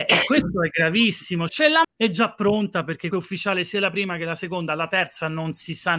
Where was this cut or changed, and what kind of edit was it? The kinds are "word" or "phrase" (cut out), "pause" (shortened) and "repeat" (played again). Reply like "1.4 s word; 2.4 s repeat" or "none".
1.5 s word; 1.8 s word; 3.1 s word